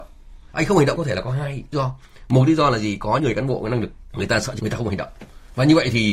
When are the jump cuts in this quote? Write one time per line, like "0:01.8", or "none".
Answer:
0:01.0
0:01.7
0:03.2
0:04.1
0:04.6

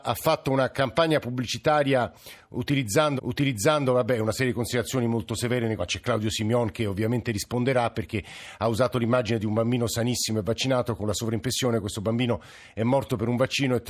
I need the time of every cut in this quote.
0:03.2
0:05.8

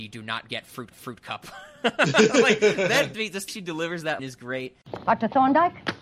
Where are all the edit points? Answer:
0:00.9
0:03.1
0:03.5
0:04.2

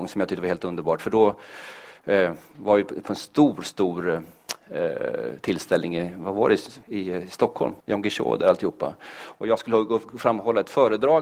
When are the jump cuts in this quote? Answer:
0:06.8
0:07.8

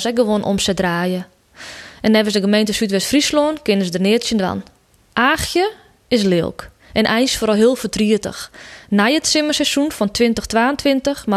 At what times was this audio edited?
0:04.9

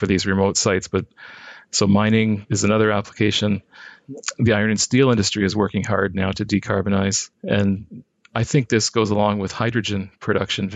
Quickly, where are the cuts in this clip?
0:07.3

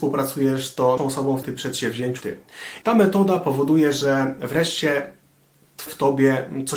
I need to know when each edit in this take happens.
0:01.0
0:01.4
0:02.2
0:02.8
0:05.9

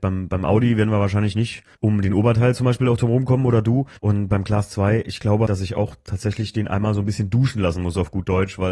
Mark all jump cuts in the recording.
0:01.7
0:04.0
0:05.5

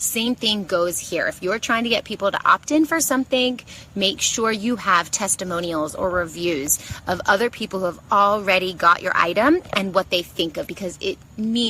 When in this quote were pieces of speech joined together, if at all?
0:10.7

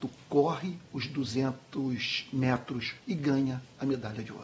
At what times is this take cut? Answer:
0:03.0

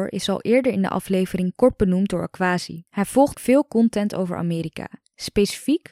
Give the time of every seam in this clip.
0:02.9
0:03.3

